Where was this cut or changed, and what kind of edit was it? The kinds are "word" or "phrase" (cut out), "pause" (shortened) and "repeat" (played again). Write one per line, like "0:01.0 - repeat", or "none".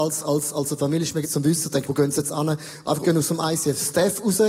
0:01.2 - word
0:01.8 - word
0:03.0 - word